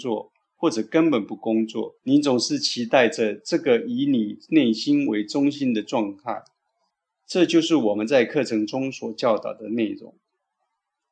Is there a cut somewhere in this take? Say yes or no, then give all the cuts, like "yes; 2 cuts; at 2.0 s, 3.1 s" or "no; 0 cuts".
yes; 2 cuts; at 2.0 s, 6.9 s